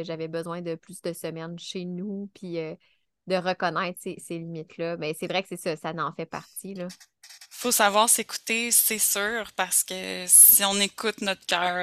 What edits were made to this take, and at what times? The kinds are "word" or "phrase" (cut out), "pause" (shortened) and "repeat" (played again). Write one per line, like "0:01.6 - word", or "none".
none